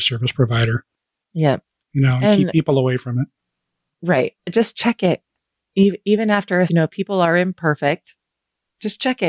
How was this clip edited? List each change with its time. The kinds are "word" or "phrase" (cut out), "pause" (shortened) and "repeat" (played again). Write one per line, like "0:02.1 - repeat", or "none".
0:04.4 - pause
0:05.4 - pause
0:06.7 - word